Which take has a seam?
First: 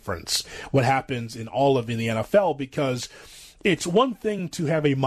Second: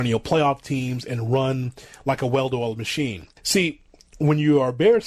second; 1 cut; at 3.4 s

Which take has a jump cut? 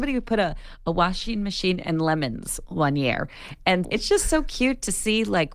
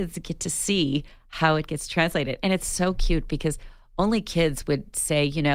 first; 1 cut; at 3.8 s

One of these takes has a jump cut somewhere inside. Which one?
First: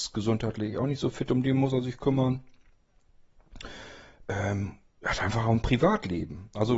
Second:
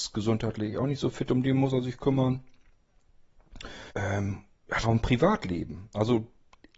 second; 2 cuts; at 3.9 s, 4.8 s

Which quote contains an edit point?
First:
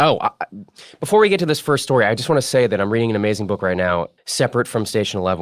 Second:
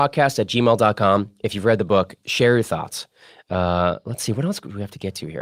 first; 1 cut; at 4.2 s

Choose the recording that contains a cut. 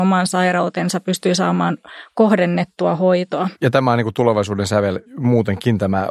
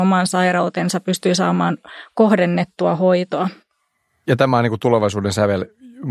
first; 2 cuts; at 3.5 s, 5.1 s

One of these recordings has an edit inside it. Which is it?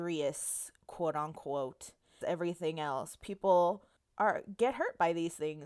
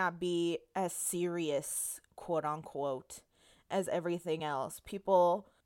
first; 1 cut; at 2.2 s

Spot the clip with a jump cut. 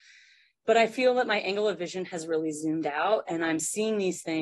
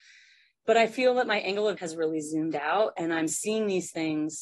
second; 1 cut; at 1.8 s

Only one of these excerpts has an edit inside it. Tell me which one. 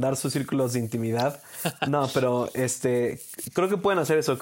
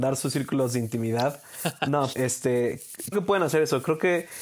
second; 2 cuts; at 2.1 s, 3.1 s

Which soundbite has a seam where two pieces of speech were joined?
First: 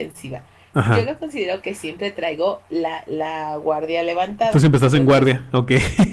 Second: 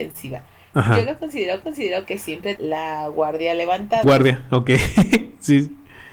second; 3 cuts; at 1.6 s, 2.6 s, 4.0 s

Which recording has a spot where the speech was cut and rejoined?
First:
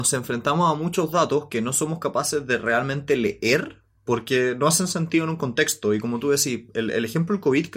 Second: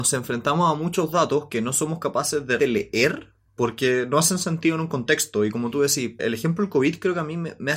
second; 2 cuts; at 2.6 s, 6.2 s

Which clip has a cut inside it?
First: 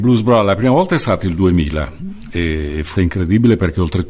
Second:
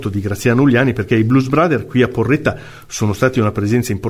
first; 1 cut; at 2.9 s

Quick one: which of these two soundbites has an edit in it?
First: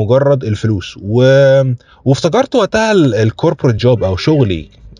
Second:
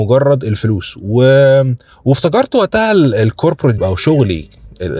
second; 1 cut; at 3.8 s

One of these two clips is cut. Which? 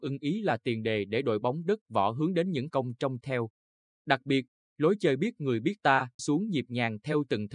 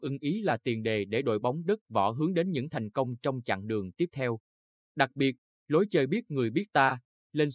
first; 3 cuts; at 2.7 s, 3.2 s, 6.2 s

